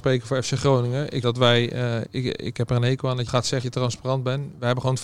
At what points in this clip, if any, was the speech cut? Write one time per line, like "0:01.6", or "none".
0:01.2
0:02.0
0:03.3
0:03.6